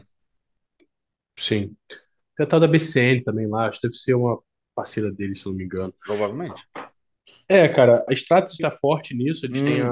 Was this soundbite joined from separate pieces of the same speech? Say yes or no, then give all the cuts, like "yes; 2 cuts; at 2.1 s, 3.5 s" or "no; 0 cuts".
yes; 2 cuts; at 8.1 s, 8.6 s